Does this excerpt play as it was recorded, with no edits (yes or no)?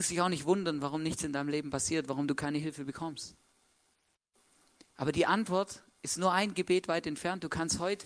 yes